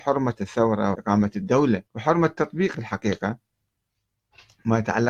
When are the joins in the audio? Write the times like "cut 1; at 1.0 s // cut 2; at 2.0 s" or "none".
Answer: cut 1; at 0.9 s // cut 2; at 1.9 s // cut 3; at 2.7 s

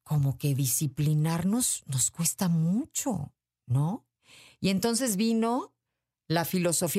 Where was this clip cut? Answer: none

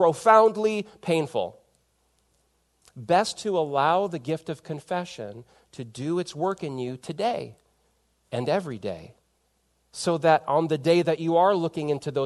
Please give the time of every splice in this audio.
none

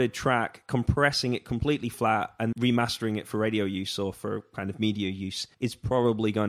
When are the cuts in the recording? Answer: cut 1; at 2.5 s // cut 2; at 5.5 s

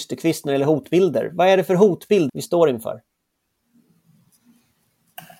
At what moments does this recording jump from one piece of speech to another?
cut 1; at 2.3 s

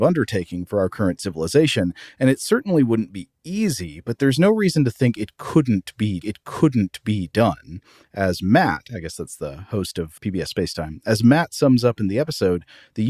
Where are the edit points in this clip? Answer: cut 1; at 6.2 s // cut 2; at 10.2 s

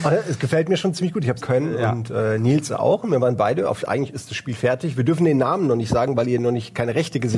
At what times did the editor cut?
cut 1; at 1.4 s // cut 2; at 3.8 s // cut 3; at 4.5 s

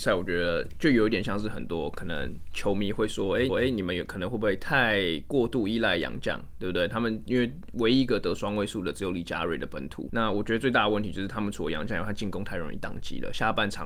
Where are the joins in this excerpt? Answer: cut 1; at 3.5 s

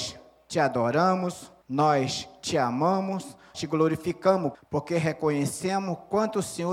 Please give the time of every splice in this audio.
cut 1; at 1.6 s // cut 2; at 3.5 s // cut 3; at 4.5 s

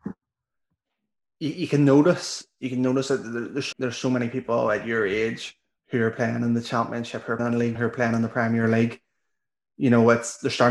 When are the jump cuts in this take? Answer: cut 1; at 3.7 s // cut 2; at 7.4 s // cut 3; at 7.7 s

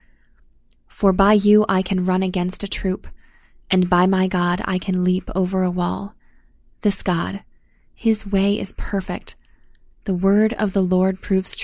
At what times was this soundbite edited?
none

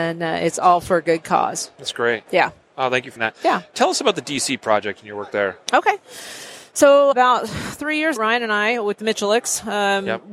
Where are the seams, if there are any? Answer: cut 1; at 3.2 s // cut 2; at 7.1 s // cut 3; at 8.2 s

